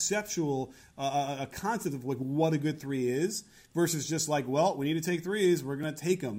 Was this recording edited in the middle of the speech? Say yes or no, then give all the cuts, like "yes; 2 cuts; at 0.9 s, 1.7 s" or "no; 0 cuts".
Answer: no; 0 cuts